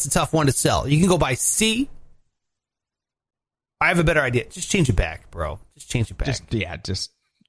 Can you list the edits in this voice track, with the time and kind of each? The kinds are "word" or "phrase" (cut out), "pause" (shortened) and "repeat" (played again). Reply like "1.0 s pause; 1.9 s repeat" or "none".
none